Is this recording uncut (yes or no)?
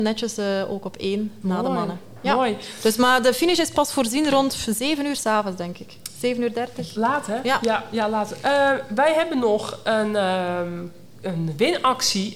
yes